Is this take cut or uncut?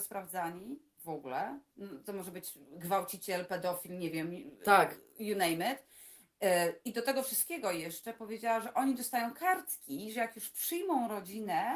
uncut